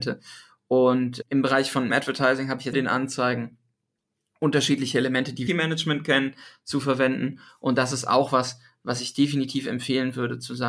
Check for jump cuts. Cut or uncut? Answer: cut